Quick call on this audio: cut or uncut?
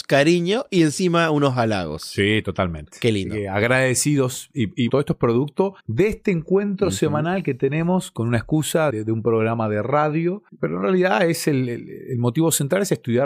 cut